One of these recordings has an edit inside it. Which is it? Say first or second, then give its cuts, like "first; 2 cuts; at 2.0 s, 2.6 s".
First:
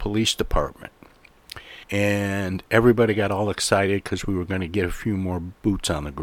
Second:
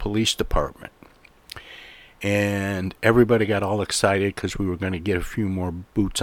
first; 1 cut; at 1.8 s